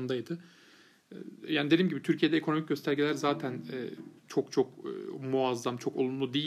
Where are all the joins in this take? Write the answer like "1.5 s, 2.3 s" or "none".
4.2 s